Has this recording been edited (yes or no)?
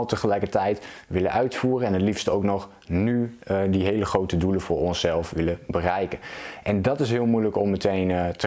no